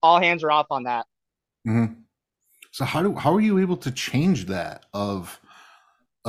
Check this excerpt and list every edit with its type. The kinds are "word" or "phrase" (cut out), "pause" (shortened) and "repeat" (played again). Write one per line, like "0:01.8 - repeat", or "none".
none